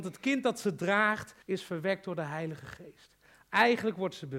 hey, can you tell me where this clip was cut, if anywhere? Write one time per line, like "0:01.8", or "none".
0:01.4

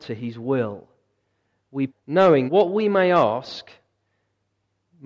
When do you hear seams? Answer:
0:01.9
0:02.5

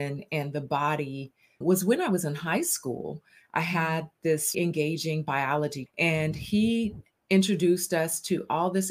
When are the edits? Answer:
0:01.6
0:04.5
0:05.9

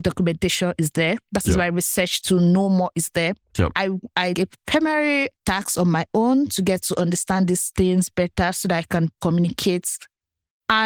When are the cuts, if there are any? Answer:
0:04.3

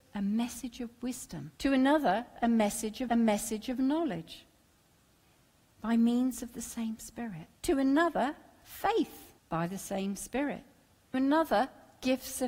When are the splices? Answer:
0:01.5
0:03.1
0:07.6
0:09.4
0:11.1

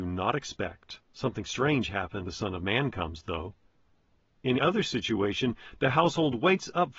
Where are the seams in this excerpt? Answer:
0:01.0
0:02.3
0:04.6

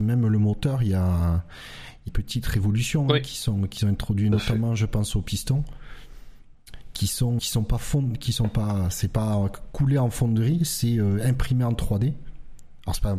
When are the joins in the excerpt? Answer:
0:02.1
0:07.4

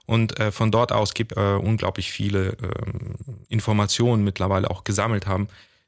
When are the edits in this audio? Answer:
0:01.3
0:03.4

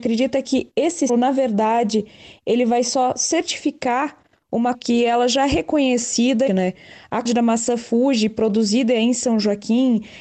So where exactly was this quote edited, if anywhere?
0:01.1
0:04.7
0:06.5
0:07.3

